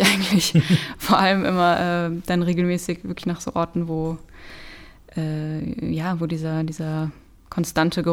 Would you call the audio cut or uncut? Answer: uncut